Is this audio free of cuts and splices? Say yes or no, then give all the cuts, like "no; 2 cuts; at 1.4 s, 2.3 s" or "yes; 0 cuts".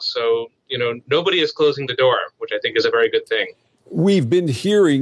yes; 0 cuts